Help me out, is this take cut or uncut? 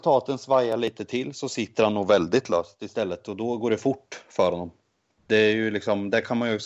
uncut